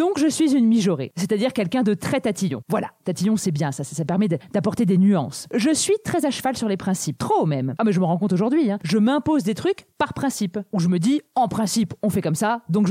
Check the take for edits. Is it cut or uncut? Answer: uncut